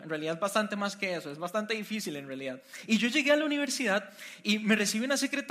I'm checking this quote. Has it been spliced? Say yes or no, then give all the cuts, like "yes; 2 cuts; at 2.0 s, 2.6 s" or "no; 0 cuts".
no; 0 cuts